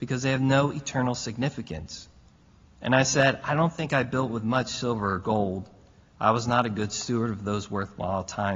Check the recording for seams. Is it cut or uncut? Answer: uncut